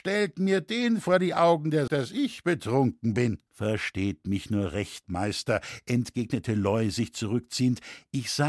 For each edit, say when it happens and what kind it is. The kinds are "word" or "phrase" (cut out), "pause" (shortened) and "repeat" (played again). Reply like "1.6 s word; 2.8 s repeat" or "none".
1.9 s word; 3.5 s pause